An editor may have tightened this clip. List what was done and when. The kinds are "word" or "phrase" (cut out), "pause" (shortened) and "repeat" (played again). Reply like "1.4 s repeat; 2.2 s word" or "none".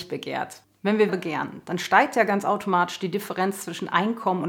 1.1 s word